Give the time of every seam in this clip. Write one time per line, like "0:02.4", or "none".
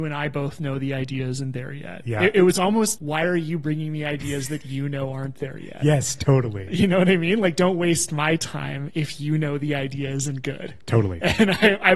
0:03.0